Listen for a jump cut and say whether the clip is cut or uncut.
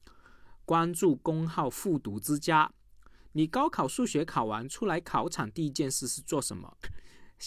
uncut